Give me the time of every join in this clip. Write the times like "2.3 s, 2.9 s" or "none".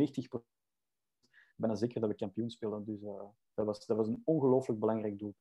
none